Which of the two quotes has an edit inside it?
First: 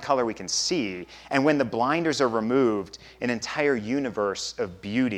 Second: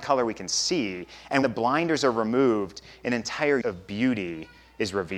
second; 2 cuts; at 1.4 s, 3.6 s

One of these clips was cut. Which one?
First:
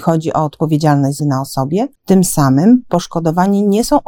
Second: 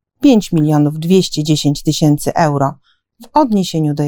first; 2 cuts; at 1.2 s, 1.9 s

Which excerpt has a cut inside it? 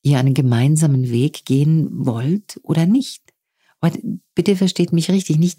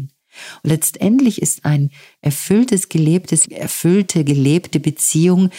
second; 1 cut; at 3.4 s

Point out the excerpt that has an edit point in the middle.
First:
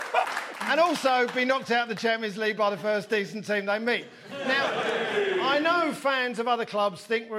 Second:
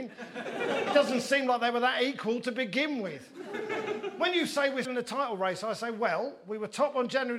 second; 1 cut; at 4.8 s

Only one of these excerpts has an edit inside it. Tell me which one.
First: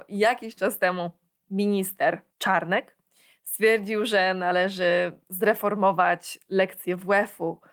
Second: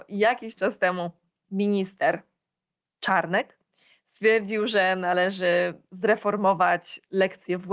first; 1 cut; at 2.3 s

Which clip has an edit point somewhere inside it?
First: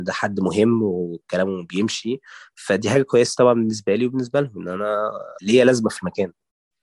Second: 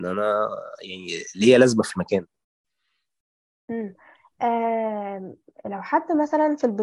first; 1 cut; at 5.4 s

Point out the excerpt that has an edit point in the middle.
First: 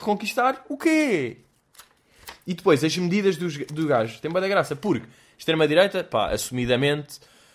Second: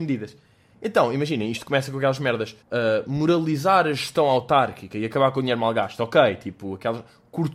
second; 1 cut; at 2.6 s

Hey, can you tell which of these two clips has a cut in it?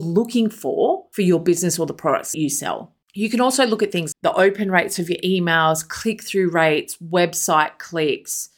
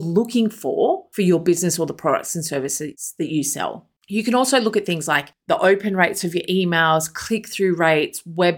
first; 2 cuts; at 2.3 s, 4.1 s

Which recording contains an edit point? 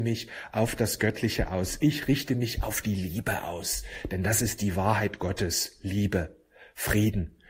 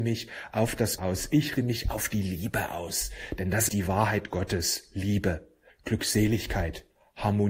second; 4 cuts; at 1.0 s, 1.6 s, 3.7 s, 5.7 s

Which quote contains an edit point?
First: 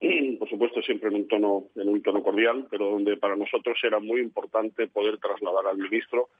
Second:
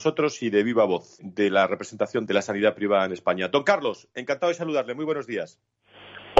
second; 2 cuts; at 1.2 s, 2.3 s

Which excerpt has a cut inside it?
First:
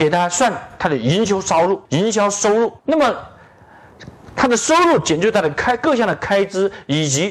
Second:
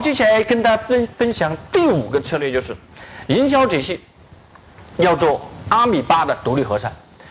first; 2 cuts; at 1.9 s, 2.8 s

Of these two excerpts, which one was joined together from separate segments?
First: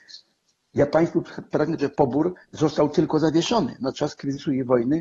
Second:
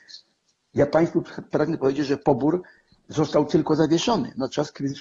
first; 2 cuts; at 1.8 s, 2.4 s

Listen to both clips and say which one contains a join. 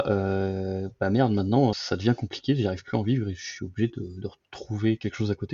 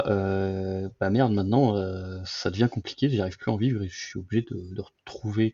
first; 1 cut; at 1.7 s

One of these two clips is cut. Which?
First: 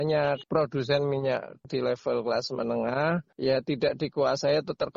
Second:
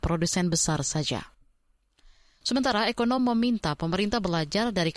first; 1 cut; at 1.6 s

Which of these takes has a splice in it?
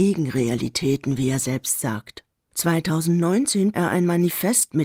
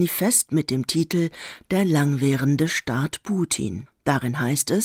first; 1 cut; at 3.7 s

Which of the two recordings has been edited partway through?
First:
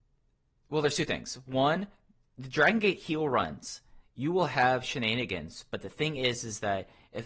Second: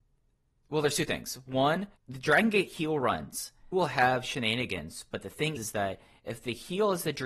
second; 3 cuts; at 2.0 s, 3.7 s, 5.6 s

